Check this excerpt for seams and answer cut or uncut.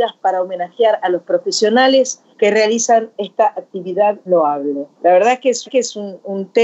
cut